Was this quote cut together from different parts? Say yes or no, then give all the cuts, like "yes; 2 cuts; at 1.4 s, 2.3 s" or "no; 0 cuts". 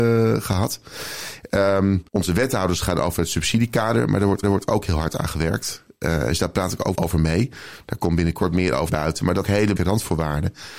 yes; 6 cuts; at 2.1 s, 4.4 s, 6.9 s, 8.9 s, 9.4 s, 9.8 s